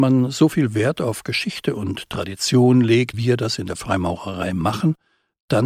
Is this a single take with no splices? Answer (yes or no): no